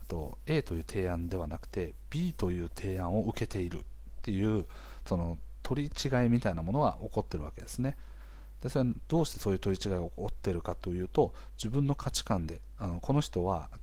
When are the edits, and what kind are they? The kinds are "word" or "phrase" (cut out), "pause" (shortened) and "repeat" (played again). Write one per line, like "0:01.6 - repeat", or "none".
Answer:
none